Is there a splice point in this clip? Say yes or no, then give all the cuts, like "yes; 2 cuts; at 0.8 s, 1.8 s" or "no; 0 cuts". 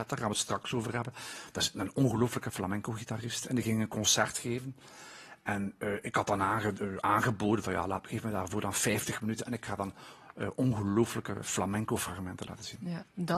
no; 0 cuts